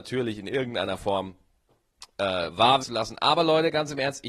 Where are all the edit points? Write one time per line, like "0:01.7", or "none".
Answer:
0:02.8

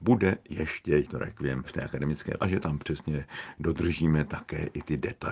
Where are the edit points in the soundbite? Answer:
0:01.1
0:02.4

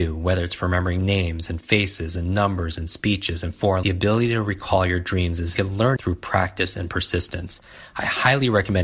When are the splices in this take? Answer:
0:03.8
0:05.5
0:06.0

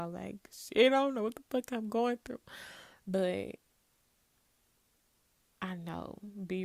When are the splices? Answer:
none

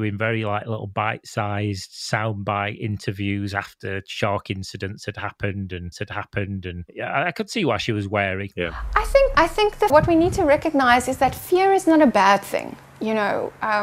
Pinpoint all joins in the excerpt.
0:05.9
0:09.3
0:09.9

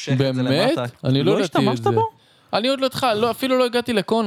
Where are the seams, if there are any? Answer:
none

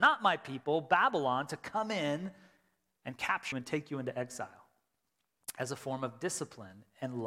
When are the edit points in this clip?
0:03.5

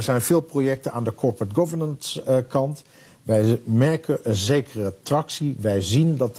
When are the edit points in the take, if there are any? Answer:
none

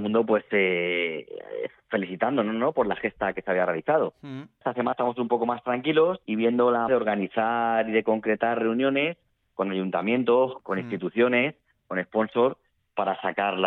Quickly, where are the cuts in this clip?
0:04.6
0:04.9
0:06.9
0:10.6

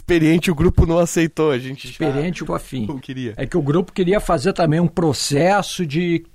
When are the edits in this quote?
0:02.5
0:03.0

